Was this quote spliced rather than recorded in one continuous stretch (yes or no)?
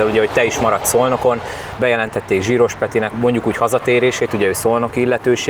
yes